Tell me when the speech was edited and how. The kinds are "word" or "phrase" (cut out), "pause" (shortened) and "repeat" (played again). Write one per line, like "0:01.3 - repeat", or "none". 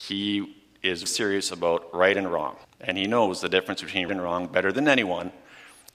0:01.1 - word
0:02.6 - pause
0:04.1 - word